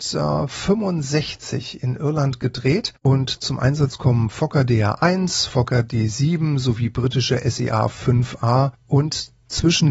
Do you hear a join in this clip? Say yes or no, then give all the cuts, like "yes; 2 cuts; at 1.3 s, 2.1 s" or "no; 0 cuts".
no; 0 cuts